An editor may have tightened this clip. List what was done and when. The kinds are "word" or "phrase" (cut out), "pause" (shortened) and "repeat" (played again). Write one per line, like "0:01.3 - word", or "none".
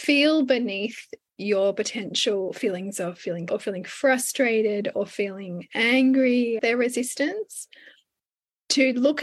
0:03.5 - word
0:06.6 - word